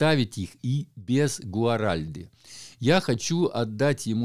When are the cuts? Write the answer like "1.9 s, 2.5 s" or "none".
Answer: none